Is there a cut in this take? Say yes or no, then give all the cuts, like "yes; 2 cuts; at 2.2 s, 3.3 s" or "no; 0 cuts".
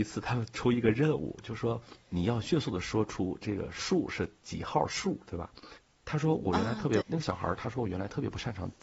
yes; 1 cut; at 7.0 s